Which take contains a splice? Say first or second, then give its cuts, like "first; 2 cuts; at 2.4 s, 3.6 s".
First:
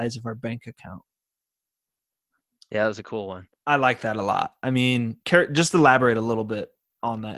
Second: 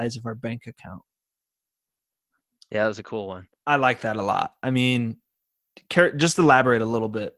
first; 1 cut; at 5.2 s